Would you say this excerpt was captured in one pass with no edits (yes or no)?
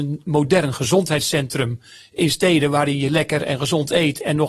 yes